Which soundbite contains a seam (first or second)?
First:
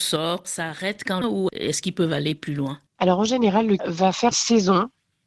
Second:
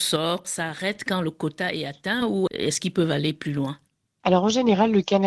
first